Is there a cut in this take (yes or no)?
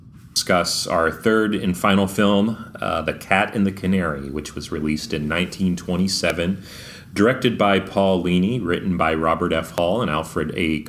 no